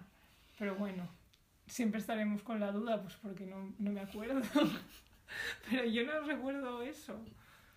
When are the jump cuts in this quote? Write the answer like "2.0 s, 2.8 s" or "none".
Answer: none